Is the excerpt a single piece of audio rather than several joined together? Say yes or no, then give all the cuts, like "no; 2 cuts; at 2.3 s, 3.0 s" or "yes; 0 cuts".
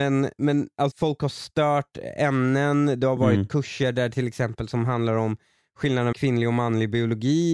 no; 2 cuts; at 0.9 s, 6.1 s